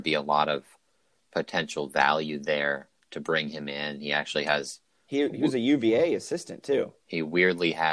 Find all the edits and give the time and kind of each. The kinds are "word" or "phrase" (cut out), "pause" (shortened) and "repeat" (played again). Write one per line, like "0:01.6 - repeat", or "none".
none